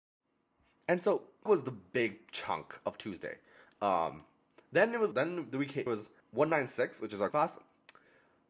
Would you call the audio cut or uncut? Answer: cut